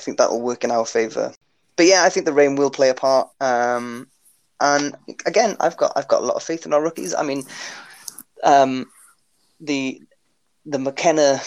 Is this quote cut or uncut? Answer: uncut